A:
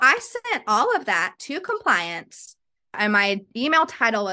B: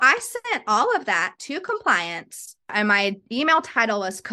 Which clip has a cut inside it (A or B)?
B